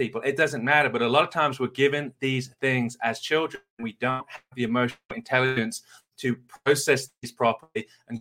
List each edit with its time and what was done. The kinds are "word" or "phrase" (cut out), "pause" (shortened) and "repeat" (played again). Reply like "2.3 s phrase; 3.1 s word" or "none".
none